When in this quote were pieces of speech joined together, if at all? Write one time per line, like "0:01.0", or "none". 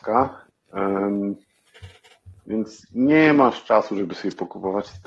0:02.8